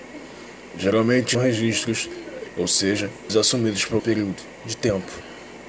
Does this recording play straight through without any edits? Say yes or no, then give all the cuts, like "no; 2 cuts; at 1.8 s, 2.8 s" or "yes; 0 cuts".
no; 4 cuts; at 1.3 s, 2.5 s, 3.3 s, 4.0 s